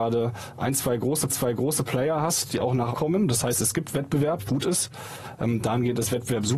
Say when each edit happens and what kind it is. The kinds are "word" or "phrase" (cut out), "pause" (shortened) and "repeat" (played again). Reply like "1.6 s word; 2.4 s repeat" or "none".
1.3 s repeat; 2.9 s word; 4.5 s phrase